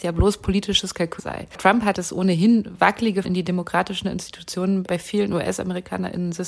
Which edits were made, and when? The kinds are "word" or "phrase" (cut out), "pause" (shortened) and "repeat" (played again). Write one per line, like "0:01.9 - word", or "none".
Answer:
0:01.2 - phrase
0:01.9 - word
0:03.2 - word
0:04.9 - word